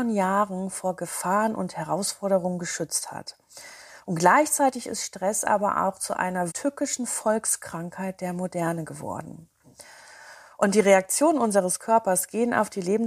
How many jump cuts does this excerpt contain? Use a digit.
1